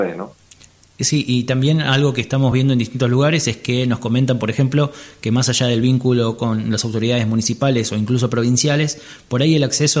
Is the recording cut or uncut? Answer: uncut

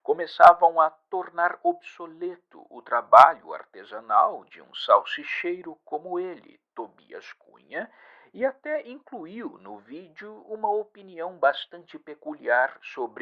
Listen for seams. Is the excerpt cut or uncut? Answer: uncut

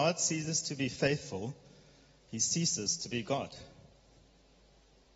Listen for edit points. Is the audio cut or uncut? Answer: uncut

